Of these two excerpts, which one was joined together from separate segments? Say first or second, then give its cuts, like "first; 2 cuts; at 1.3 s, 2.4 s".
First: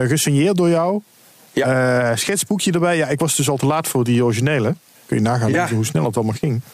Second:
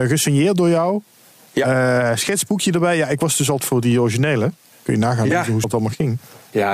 second; 2 cuts; at 3.6 s, 5.6 s